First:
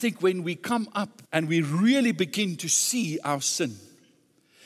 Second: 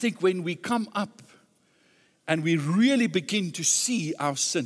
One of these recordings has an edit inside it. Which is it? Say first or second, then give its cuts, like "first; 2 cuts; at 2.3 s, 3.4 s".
first; 1 cut; at 1.2 s